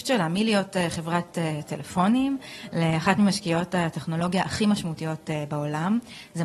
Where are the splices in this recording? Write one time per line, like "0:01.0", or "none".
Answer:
none